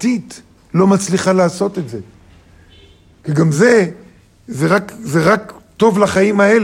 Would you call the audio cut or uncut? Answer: uncut